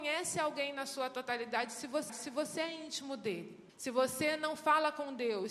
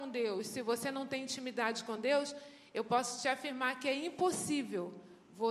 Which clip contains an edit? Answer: first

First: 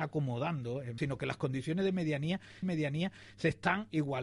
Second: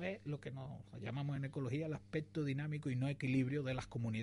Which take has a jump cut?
first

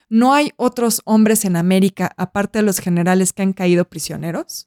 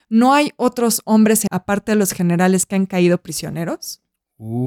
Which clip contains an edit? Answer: second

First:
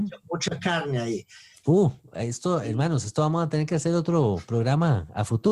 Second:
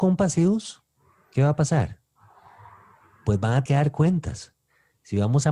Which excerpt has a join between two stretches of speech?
second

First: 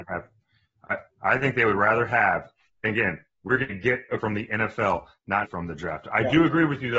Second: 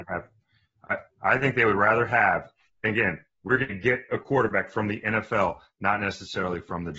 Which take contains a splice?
first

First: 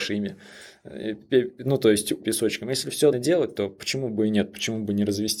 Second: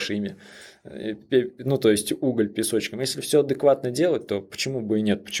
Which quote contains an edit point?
first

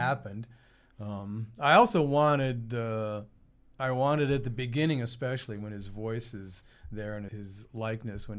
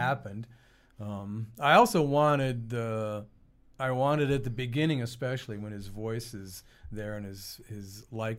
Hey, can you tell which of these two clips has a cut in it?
first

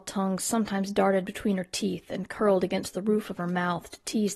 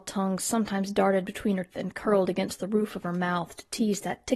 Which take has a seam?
second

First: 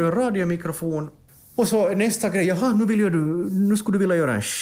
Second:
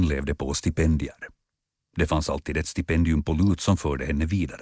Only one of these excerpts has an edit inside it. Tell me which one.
first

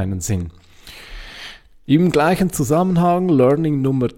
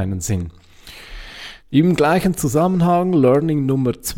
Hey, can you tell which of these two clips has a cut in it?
second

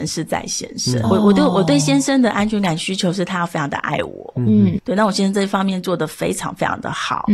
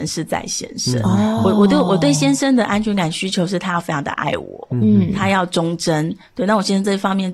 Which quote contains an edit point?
first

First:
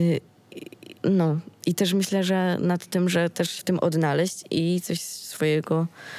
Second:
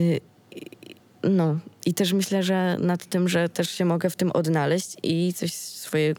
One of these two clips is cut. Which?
first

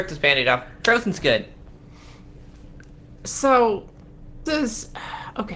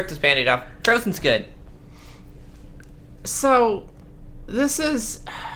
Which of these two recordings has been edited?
first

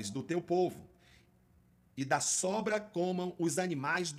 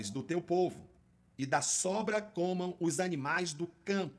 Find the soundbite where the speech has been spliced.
second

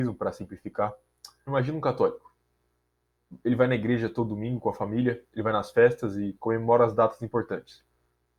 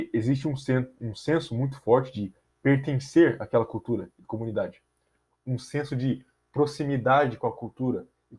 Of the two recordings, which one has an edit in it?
first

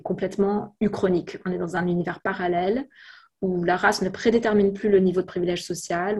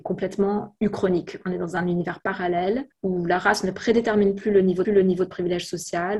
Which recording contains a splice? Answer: second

